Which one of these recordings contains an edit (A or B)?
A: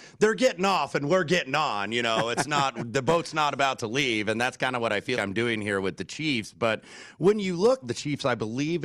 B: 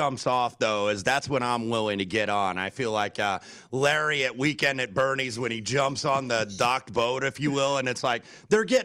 A